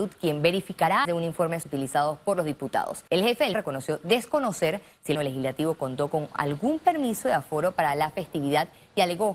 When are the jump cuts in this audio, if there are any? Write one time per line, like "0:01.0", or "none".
0:01.0
0:01.6
0:03.1
0:03.5
0:05.1